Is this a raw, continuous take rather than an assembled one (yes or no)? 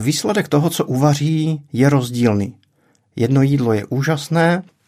yes